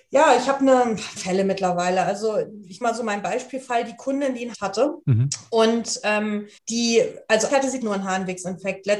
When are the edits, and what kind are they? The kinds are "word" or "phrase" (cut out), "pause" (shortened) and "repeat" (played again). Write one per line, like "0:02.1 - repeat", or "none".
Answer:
0:01.2 - word
0:02.8 - word
0:04.5 - word
0:05.0 - pause
0:06.6 - pause
0:07.5 - word
0:07.8 - word